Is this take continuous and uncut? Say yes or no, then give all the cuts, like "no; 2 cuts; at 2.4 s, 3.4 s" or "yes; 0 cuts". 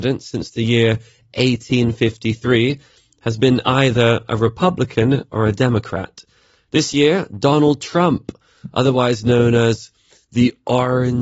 yes; 0 cuts